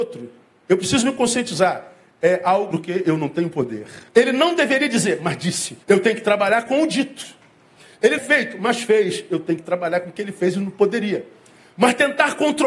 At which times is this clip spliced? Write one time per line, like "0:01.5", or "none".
0:02.7
0:04.1
0:05.8
0:08.2

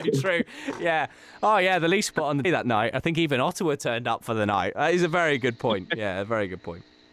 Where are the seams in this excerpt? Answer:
0:02.4

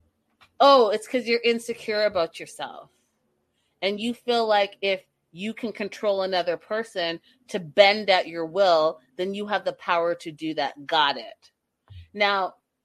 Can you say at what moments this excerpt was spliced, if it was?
none

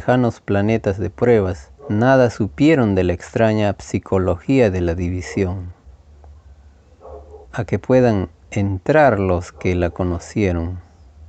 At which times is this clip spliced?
0:01.8
0:07.4

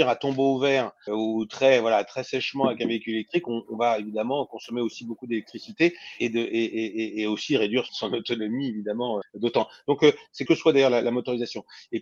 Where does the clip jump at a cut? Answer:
0:01.1
0:03.7
0:06.2
0:07.9
0:09.2
0:10.5

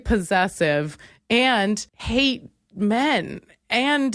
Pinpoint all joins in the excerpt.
0:01.9

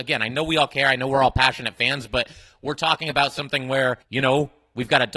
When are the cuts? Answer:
0:04.0

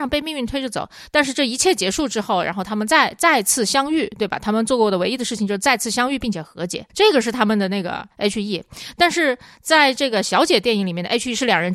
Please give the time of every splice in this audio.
0:06.9
0:08.1

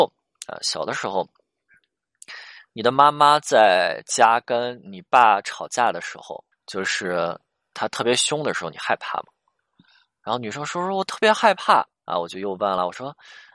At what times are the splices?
0:06.5
0:11.9

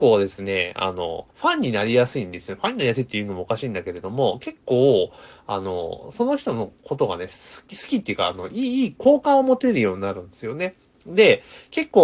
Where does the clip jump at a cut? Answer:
0:01.3

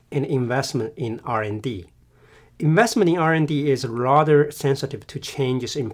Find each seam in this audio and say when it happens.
none

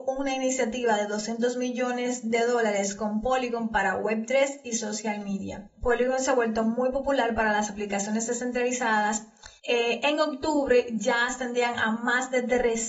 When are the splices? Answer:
0:09.6

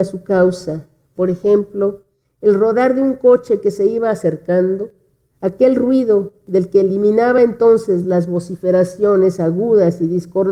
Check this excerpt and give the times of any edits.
none

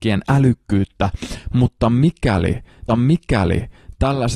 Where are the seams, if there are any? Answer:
0:02.9

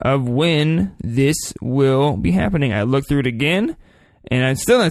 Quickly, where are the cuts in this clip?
none

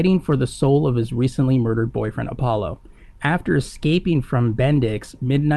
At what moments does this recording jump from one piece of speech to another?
none

